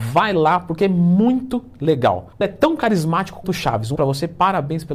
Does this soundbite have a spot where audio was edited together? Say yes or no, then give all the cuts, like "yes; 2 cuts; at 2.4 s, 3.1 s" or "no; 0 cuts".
yes; 3 cuts; at 2.4 s, 3.4 s, 4.0 s